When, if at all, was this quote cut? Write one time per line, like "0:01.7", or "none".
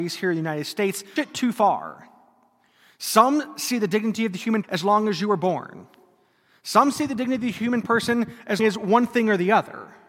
0:01.2
0:04.6
0:08.6

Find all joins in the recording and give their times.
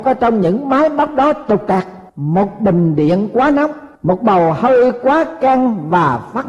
0:02.1
0:03.9

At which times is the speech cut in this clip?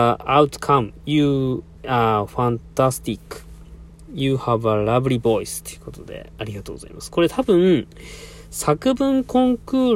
none

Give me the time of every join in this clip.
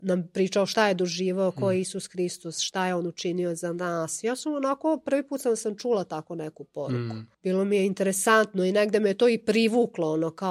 0:07.3

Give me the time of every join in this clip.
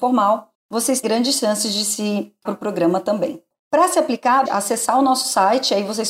0:01.0
0:02.5
0:04.5

